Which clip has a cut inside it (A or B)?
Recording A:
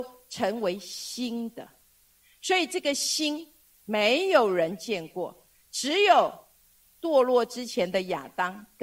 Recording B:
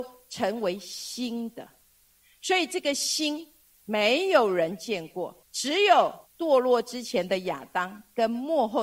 B